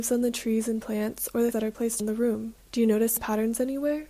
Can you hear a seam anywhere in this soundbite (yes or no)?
yes